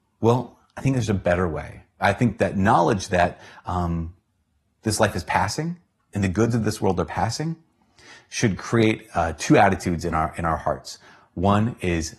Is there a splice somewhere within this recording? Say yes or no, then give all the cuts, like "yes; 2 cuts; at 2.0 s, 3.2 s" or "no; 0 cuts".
no; 0 cuts